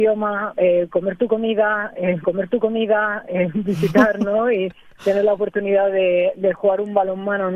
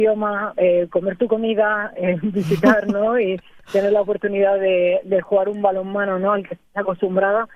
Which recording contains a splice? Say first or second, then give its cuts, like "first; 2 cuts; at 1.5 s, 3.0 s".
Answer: first; 1 cut; at 2.2 s